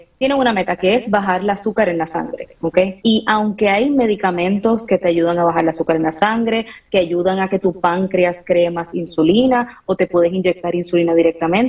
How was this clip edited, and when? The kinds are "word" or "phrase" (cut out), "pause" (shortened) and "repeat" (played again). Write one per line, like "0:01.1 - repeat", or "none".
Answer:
0:03.0 - pause

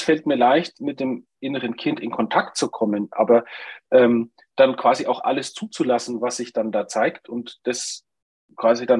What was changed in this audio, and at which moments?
none

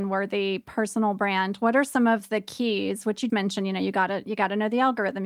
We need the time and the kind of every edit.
0:03.3 - word

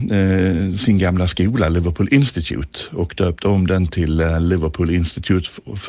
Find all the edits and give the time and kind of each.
none

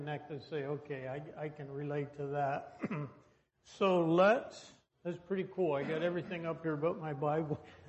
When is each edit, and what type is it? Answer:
none

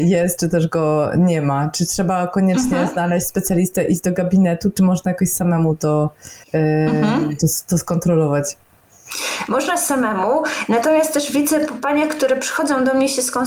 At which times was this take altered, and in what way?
0:06.4 - pause
0:07.7 - phrase

